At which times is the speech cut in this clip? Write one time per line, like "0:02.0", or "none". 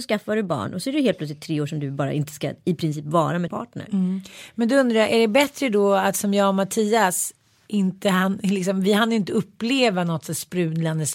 0:03.5

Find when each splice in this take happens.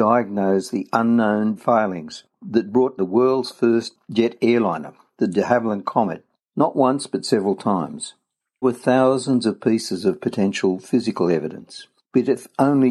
0:01.6
0:03.0
0:08.6

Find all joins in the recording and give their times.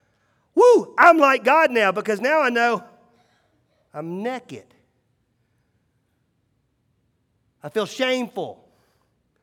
none

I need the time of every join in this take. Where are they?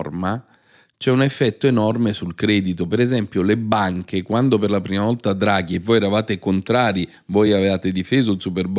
none

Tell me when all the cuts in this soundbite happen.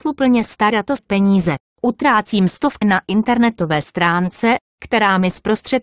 0:01.0
0:02.8

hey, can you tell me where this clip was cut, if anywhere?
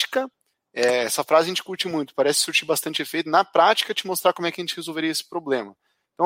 none

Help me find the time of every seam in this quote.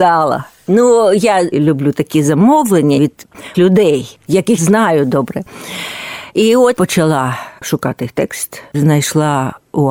0:01.5
0:03.0
0:03.5
0:04.6
0:06.8

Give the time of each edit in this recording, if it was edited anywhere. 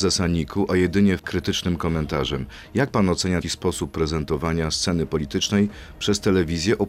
0:01.2
0:03.4

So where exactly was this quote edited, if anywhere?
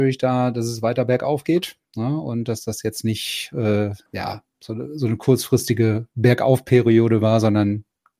0:04.1

